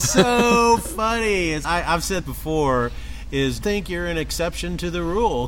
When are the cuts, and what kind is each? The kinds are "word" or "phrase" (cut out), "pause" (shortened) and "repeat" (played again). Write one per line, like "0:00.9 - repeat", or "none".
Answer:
0:01.6 - word
0:02.2 - word
0:03.6 - word